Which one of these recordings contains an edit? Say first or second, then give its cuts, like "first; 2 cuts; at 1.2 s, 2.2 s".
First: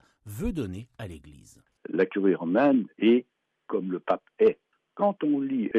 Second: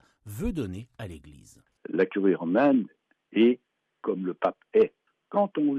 first; 1 cut; at 2.9 s